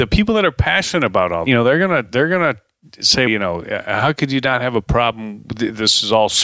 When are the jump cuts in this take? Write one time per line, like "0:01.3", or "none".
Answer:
0:01.5
0:03.3